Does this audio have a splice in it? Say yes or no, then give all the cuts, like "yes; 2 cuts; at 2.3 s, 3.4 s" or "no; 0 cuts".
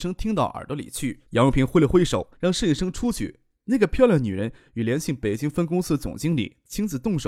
yes; 2 cuts; at 1.2 s, 2.3 s